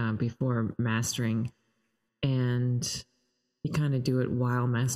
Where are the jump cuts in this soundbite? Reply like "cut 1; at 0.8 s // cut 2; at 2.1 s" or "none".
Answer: none